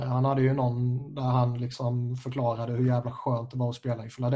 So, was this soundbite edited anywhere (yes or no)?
no